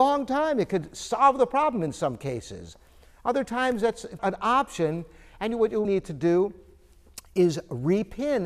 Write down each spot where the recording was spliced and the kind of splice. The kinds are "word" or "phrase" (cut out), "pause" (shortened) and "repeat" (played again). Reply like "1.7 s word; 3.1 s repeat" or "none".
4.2 s word; 5.8 s word

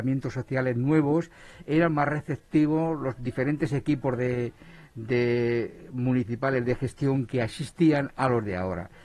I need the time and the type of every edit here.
none

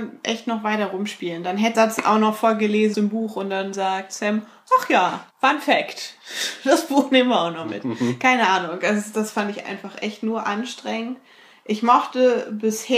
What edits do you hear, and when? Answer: 1.7 s phrase; 2.9 s word; 5.3 s pause

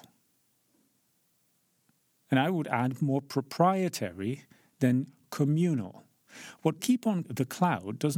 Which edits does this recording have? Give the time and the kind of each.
6.8 s word; 7.2 s word

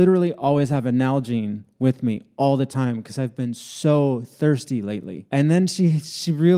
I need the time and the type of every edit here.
5.3 s pause

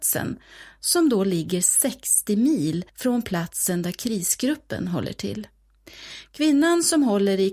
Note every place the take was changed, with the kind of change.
2.9 s pause

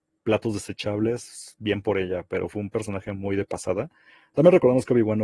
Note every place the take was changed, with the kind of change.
none

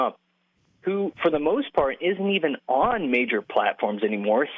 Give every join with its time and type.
none

